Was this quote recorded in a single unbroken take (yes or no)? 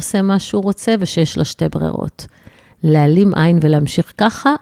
yes